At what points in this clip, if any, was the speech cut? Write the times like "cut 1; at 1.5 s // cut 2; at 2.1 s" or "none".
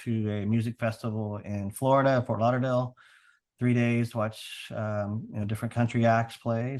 none

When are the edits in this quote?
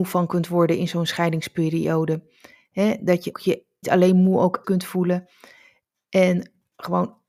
cut 1; at 3.3 s // cut 2; at 3.8 s // cut 3; at 4.6 s

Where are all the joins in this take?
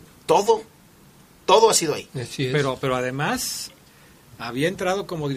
cut 1; at 2.1 s

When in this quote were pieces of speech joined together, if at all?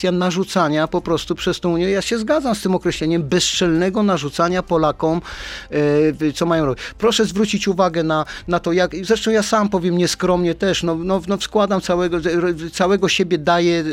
none

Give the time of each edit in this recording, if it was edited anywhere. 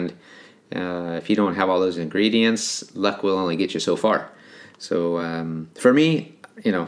none

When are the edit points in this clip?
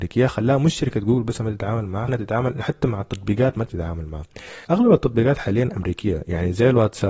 cut 1; at 2.1 s // cut 2; at 3.7 s // cut 3; at 4.6 s

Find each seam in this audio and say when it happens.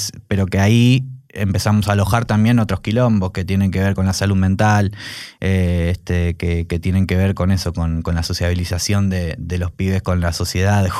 none

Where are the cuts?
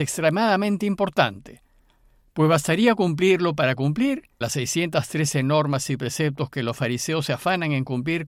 cut 1; at 4.4 s

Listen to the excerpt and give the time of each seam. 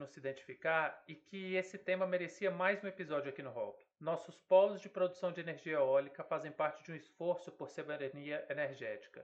cut 1; at 3.9 s

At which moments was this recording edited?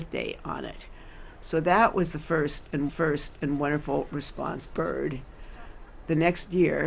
cut 1; at 2.9 s // cut 2; at 4.7 s

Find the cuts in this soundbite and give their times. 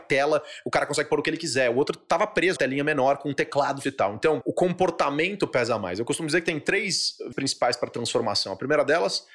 cut 1; at 2.6 s // cut 2; at 3.8 s // cut 3; at 4.4 s // cut 4; at 7.3 s

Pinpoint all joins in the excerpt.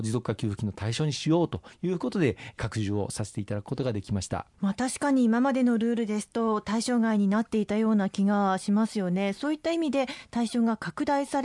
cut 1; at 4.5 s

